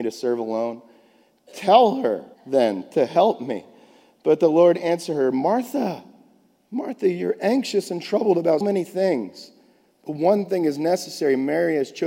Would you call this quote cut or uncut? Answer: cut